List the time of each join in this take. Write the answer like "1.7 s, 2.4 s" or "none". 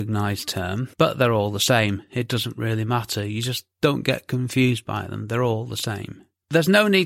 0.9 s, 3.7 s